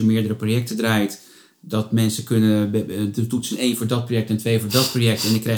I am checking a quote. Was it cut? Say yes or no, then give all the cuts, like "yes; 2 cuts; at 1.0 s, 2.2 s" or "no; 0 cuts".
no; 0 cuts